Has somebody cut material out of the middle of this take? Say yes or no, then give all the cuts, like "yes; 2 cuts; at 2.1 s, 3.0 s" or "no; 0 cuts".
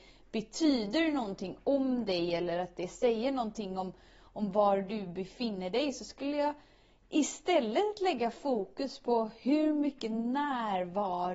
no; 0 cuts